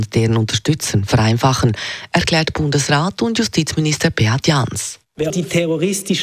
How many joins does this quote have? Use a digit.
1